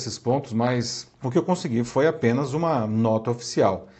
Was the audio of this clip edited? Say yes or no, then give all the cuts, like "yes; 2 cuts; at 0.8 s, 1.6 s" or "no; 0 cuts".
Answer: yes; 1 cut; at 1.1 s